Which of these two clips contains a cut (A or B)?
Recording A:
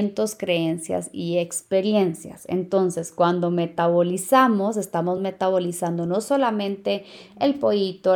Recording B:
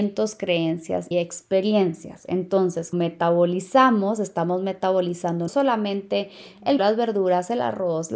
B